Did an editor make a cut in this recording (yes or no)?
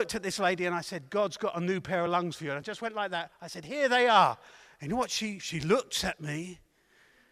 no